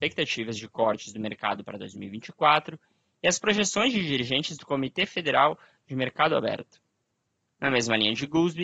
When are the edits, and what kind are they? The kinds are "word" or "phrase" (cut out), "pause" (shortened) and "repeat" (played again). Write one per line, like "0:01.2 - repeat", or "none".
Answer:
none

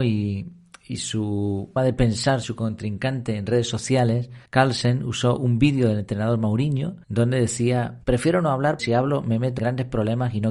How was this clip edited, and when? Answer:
0:01.8 - word
0:02.4 - word
0:04.5 - pause
0:07.0 - pause
0:08.0 - pause
0:08.8 - word
0:09.6 - word

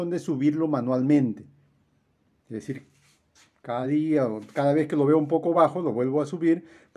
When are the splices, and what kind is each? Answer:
none

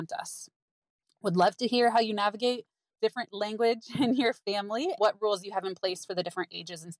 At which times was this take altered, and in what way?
0:02.9 - word
0:05.0 - word

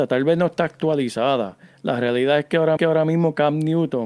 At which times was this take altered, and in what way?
0:02.8 - repeat

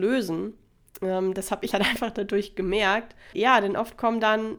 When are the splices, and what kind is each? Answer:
0:01.7 - word

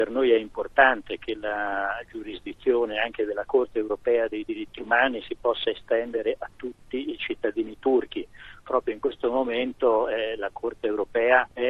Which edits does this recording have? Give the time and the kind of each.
none

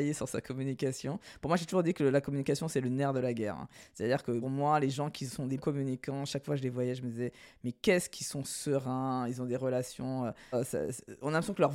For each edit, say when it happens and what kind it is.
0:04.4 - word
0:05.6 - word
0:10.5 - word

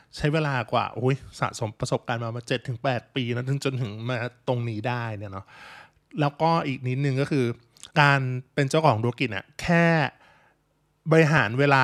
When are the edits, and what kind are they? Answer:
0:07.9 - pause

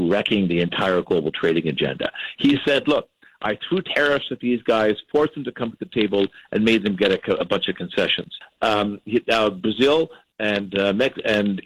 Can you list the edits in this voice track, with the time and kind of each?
none

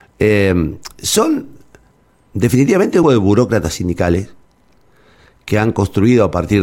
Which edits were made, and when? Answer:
0:03.0 - word

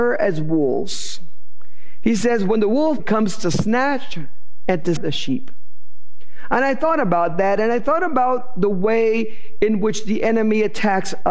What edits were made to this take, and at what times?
0:03.0 - phrase
0:05.0 - word

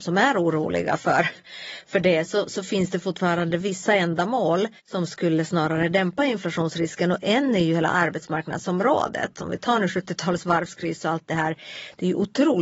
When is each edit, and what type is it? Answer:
0:04.8 - pause

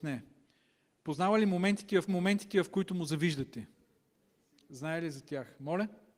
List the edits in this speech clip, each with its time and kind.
0:02.1 - repeat

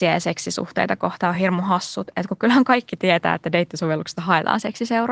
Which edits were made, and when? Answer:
none

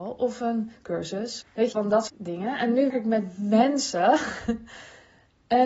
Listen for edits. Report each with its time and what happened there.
0:01.4 - word
0:01.7 - word
0:02.1 - word
0:02.9 - word

